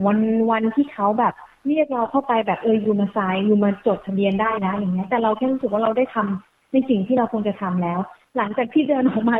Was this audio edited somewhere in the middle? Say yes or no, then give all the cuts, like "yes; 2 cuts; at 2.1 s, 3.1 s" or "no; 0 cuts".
no; 0 cuts